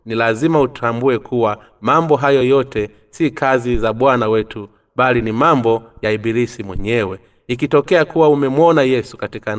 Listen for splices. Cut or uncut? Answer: uncut